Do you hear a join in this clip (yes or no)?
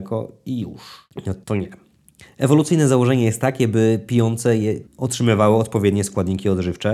yes